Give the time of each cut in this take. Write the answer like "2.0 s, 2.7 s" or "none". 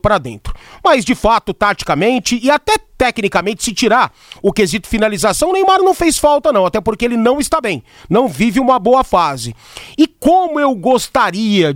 none